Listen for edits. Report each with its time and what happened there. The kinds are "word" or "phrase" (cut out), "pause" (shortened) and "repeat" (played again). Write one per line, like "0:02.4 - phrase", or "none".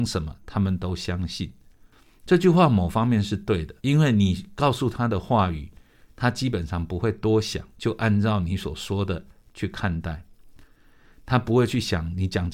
0:03.8 - pause
0:07.7 - pause